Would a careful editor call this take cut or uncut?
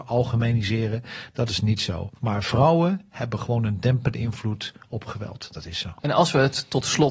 cut